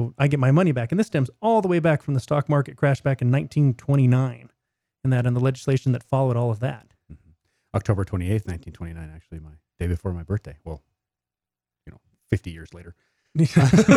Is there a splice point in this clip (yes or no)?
no